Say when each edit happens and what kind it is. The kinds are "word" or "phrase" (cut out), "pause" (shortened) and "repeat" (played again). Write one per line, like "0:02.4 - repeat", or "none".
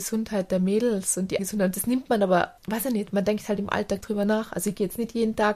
0:01.4 - word
0:02.6 - pause
0:04.0 - word